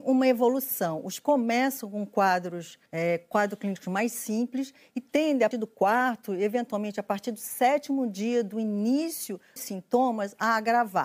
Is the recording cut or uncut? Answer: cut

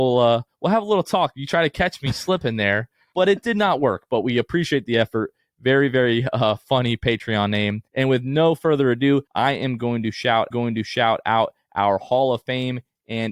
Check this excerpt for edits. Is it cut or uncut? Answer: cut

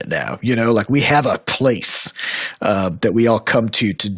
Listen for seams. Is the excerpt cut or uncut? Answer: uncut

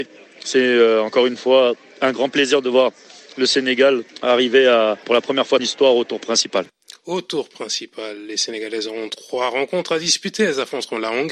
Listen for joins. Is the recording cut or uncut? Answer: cut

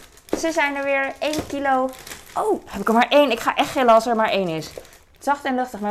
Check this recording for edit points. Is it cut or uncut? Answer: uncut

